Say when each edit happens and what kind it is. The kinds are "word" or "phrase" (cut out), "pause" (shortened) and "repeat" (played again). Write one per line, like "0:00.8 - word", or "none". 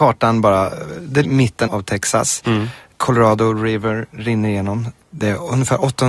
0:01.2 - phrase
0:01.7 - word